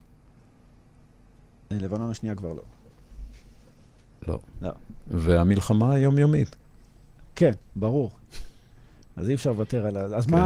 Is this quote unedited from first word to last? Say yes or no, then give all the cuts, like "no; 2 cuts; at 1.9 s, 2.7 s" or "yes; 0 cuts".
yes; 0 cuts